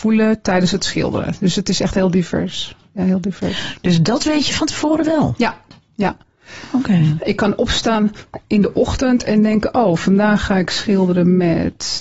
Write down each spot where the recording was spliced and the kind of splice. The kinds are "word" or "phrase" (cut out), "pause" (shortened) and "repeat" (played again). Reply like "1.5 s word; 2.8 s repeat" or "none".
none